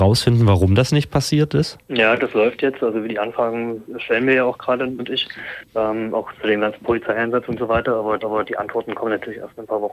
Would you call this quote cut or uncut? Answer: cut